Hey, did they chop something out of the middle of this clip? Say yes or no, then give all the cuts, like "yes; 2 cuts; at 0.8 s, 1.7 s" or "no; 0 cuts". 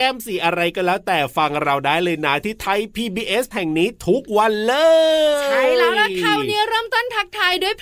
yes; 1 cut; at 3.5 s